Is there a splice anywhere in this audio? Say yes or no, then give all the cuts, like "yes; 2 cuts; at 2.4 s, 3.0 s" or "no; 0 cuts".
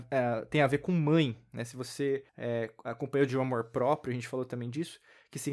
yes; 1 cut; at 2.3 s